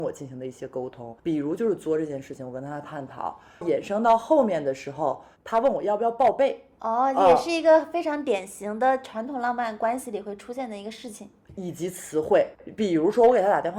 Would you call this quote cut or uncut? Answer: cut